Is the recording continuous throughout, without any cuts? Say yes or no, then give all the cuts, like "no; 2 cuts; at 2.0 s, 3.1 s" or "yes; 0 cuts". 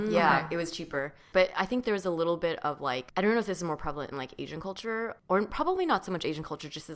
yes; 0 cuts